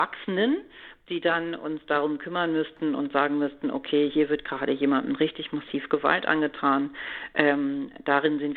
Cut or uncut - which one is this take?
uncut